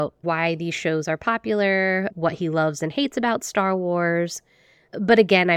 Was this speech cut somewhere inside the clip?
no; 0 cuts

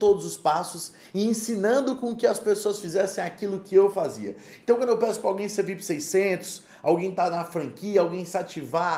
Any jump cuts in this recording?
no; 0 cuts

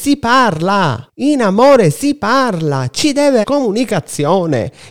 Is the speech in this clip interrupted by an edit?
yes; 2 cuts; at 1.1 s, 3.4 s

